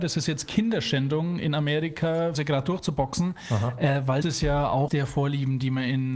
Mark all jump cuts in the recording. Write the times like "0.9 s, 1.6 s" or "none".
2.3 s, 4.2 s, 4.9 s